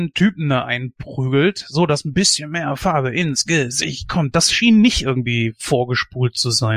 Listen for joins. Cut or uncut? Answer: uncut